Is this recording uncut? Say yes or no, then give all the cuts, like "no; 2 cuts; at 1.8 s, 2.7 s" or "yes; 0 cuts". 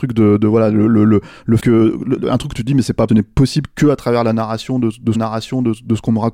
no; 3 cuts; at 1.6 s, 3.1 s, 5.1 s